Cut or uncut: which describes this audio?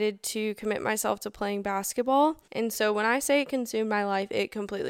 cut